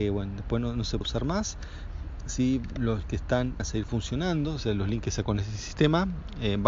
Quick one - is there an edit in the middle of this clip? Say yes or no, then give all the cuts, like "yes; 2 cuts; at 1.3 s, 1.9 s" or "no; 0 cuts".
yes; 4 cuts; at 1.0 s, 3.0 s, 3.6 s, 5.2 s